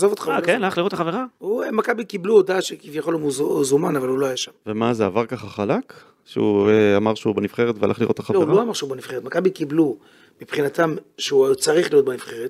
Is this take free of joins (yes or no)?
yes